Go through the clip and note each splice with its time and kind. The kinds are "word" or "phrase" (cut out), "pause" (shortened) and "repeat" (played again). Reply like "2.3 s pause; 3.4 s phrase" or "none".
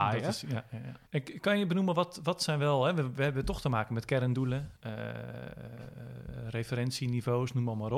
1.1 s pause; 4.8 s pause